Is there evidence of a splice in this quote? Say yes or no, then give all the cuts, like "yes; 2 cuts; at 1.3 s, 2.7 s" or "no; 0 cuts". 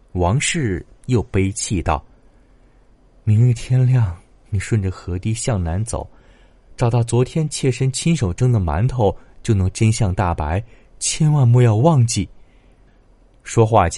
no; 0 cuts